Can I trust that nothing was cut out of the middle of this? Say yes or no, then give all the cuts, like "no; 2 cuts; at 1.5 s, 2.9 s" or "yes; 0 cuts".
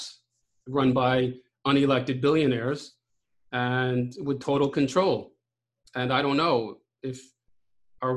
yes; 0 cuts